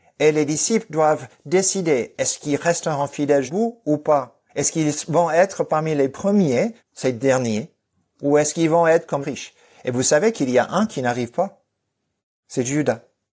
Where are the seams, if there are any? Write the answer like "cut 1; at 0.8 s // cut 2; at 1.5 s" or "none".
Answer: cut 1; at 3.5 s // cut 2; at 4.5 s // cut 3; at 6.8 s // cut 4; at 9.2 s